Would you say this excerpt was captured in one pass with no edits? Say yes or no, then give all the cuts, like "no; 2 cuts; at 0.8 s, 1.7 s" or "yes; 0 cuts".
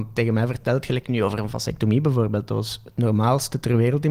yes; 0 cuts